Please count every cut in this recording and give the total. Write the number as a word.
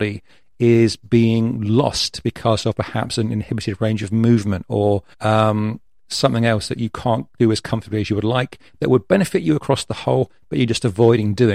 one